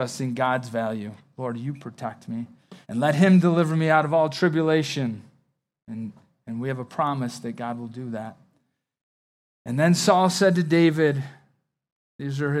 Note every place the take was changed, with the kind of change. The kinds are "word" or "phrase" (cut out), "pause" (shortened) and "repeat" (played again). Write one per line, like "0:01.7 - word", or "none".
0:02.8 - pause